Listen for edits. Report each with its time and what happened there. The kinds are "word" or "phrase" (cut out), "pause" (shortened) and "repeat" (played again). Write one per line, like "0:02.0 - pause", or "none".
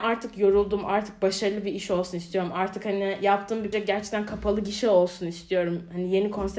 0:03.7 - word